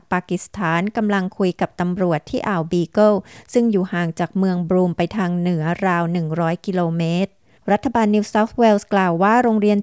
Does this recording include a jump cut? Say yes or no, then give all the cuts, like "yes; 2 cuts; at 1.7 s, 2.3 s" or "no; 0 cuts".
no; 0 cuts